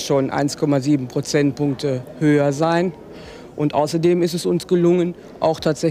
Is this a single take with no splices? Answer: yes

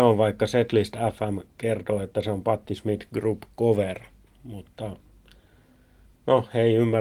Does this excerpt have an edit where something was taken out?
no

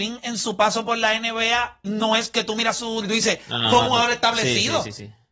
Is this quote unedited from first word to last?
no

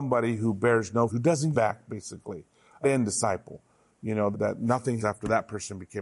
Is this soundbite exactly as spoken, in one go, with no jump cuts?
no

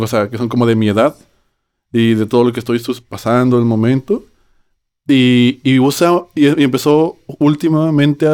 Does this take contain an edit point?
no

